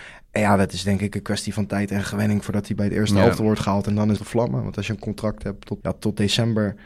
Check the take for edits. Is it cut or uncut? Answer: cut